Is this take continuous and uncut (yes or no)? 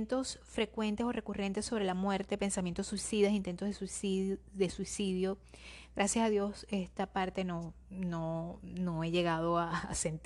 yes